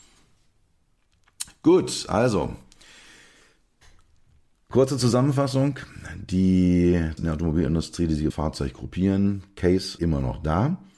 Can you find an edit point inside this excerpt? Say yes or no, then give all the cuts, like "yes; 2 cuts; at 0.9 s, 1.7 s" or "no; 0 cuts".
yes; 3 cuts; at 7.2 s, 8.3 s, 10.0 s